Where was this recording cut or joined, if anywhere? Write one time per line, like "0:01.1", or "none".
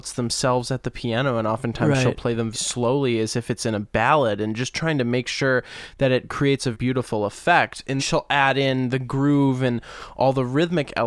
0:02.5
0:06.7
0:08.0

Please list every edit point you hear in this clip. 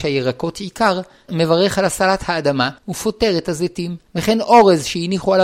0:01.3
0:02.8
0:04.1

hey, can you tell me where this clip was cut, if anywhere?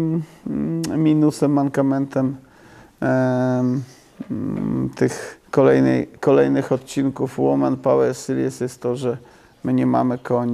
0:05.5

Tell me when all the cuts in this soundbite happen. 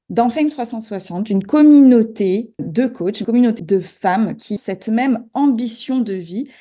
0:02.6
0:03.2
0:03.6
0:04.6

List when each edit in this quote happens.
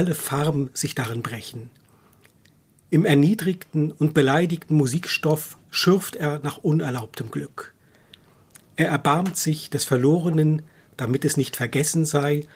none

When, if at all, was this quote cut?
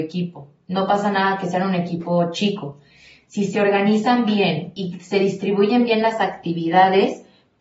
none

